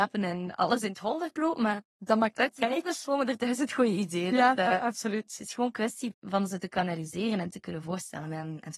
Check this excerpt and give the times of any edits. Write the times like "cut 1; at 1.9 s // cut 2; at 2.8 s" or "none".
none